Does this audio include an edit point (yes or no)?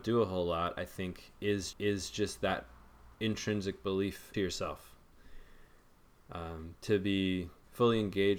yes